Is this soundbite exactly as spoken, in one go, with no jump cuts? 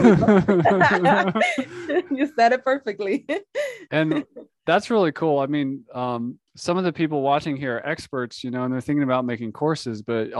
no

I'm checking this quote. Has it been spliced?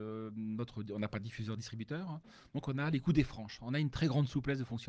no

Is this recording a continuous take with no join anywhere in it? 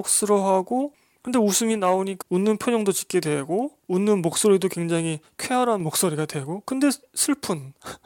no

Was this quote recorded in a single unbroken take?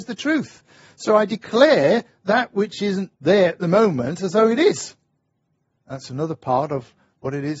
no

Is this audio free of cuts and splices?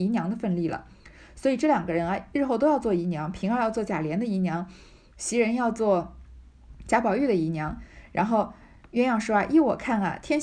yes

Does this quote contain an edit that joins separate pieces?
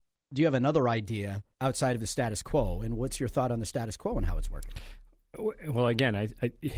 yes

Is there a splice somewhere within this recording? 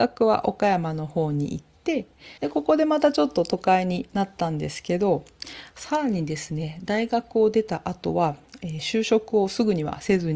yes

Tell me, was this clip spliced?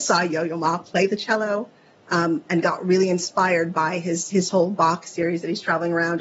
no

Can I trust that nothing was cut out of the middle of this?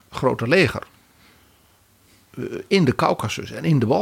yes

